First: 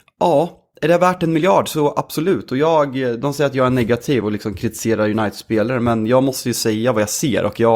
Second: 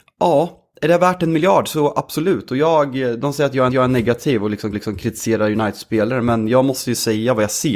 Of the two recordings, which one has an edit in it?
second; 2 cuts; at 3.7 s, 4.7 s

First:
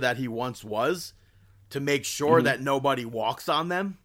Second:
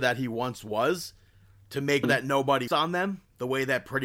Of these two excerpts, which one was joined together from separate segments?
second; 2 cuts; at 2.0 s, 2.7 s

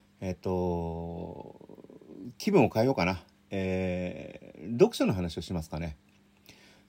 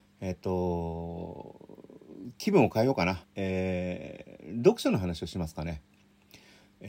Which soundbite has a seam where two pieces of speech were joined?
second; 1 cut; at 3.2 s

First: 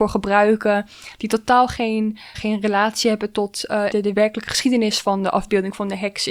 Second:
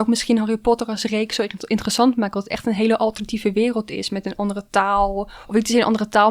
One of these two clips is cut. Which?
first; 2 cuts; at 2.3 s, 3.9 s

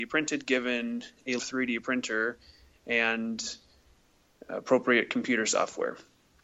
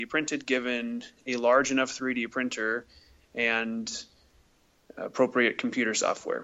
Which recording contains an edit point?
first; 1 cut; at 1.4 s

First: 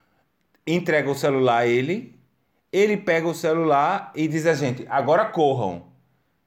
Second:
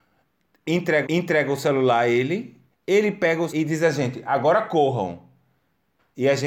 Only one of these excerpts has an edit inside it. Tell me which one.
second; 3 cuts; at 1.0 s, 2.7 s, 3.5 s

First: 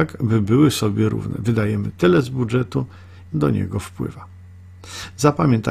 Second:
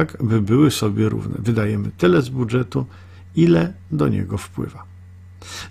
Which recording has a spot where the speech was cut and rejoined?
first; 1 cut; at 3.3 s

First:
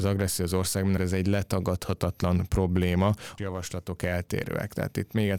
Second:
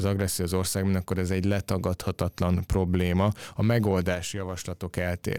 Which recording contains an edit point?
first; 2 cuts; at 1.0 s, 3.4 s

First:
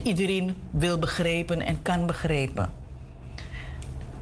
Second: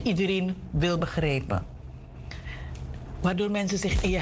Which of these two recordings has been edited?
second; 1 cut; at 1.0 s

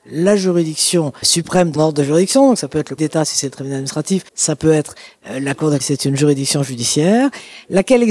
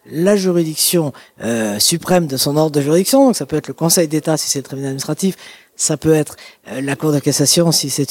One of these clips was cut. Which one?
first; 5 cuts; at 1.2 s, 1.8 s, 3.0 s, 4.3 s, 5.8 s

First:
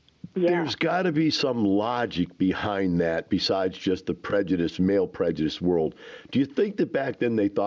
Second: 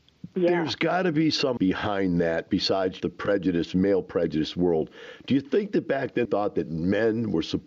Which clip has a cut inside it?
second; 3 cuts; at 1.6 s, 3.0 s, 6.2 s

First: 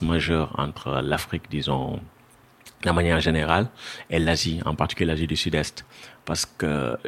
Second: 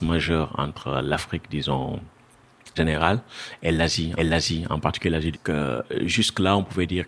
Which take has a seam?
second; 3 cuts; at 2.8 s, 4.2 s, 5.3 s

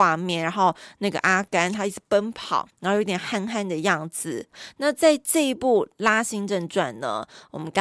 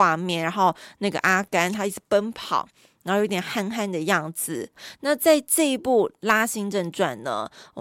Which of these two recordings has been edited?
first; 1 cut; at 2.7 s

